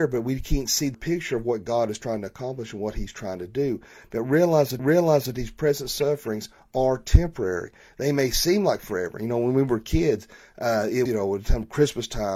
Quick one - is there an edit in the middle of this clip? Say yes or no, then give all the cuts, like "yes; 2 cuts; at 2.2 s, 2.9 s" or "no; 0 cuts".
yes; 3 cuts; at 0.9 s, 4.8 s, 11.1 s